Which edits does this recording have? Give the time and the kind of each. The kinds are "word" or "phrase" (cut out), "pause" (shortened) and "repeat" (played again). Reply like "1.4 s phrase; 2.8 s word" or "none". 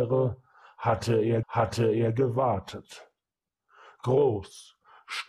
1.4 s repeat